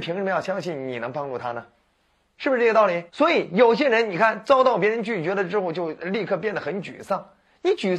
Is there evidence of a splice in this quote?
yes; 1 cut; at 3.1 s

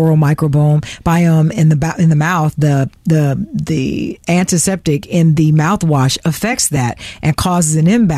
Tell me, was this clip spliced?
no; 0 cuts

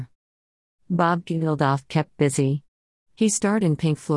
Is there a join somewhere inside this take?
no; 0 cuts

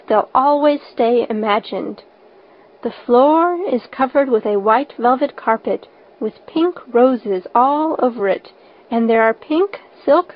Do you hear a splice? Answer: no; 0 cuts

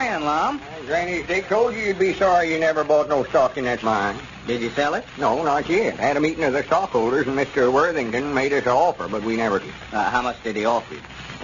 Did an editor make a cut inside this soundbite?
yes; 3 cuts; at 1.4 s, 3.8 s, 9.6 s

